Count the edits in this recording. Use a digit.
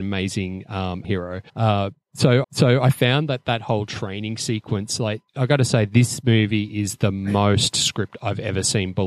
4